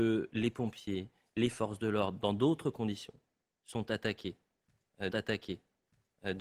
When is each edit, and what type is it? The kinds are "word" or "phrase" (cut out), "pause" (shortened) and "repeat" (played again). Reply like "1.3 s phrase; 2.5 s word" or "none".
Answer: 5.1 s repeat